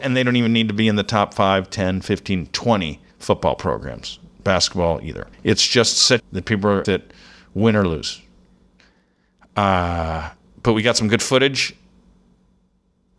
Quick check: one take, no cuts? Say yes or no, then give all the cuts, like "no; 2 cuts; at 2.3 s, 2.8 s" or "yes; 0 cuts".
no; 5 cuts; at 3.1 s, 5.3 s, 6.2 s, 6.8 s, 10.4 s